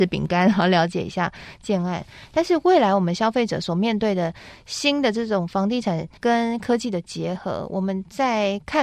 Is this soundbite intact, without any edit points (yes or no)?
no